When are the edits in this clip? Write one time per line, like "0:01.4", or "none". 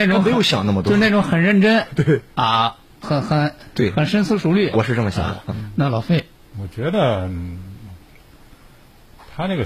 0:03.0
0:04.7
0:05.5
0:06.5